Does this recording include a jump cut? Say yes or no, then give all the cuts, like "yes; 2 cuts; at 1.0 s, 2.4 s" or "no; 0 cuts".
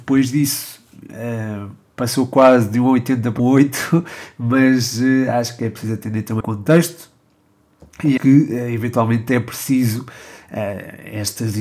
yes; 3 cuts; at 3.4 s, 6.4 s, 8.2 s